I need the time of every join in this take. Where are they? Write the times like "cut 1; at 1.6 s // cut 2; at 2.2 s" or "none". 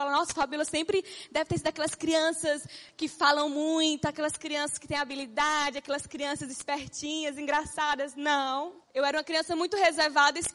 cut 1; at 8.8 s